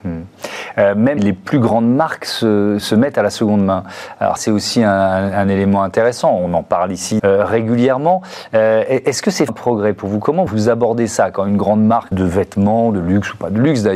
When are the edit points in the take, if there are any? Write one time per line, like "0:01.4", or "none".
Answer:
0:01.2
0:02.8
0:04.4
0:07.2
0:09.5
0:10.5
0:12.1